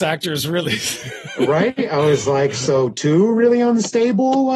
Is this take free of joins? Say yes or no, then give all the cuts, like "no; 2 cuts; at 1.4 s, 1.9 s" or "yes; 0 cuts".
yes; 0 cuts